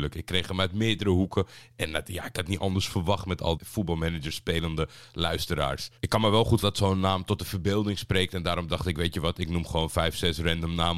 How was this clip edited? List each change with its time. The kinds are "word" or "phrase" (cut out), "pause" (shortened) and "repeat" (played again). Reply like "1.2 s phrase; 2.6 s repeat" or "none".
3.6 s phrase; 6.0 s pause; 6.6 s word